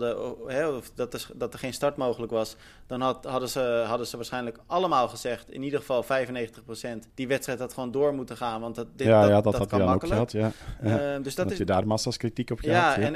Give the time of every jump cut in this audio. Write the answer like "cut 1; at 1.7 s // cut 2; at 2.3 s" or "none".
cut 1; at 7.1 s